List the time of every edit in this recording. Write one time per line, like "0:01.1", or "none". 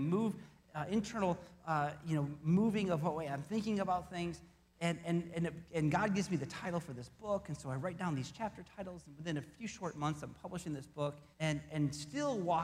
0:11.3